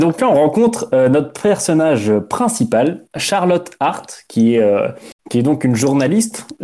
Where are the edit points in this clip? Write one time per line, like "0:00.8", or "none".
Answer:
0:05.2